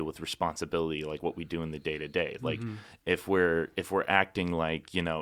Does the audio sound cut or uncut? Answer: uncut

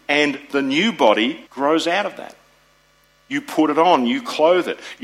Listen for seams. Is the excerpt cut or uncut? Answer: cut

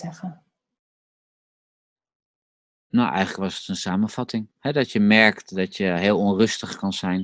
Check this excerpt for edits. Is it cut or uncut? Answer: uncut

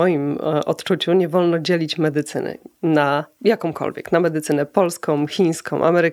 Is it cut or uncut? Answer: uncut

